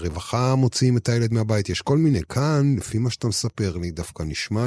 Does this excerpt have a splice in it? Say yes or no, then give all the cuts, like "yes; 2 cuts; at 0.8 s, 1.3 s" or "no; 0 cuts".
no; 0 cuts